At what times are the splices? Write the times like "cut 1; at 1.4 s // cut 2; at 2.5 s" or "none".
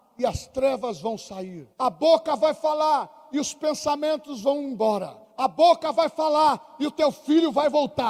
cut 1; at 1.7 s // cut 2; at 5.2 s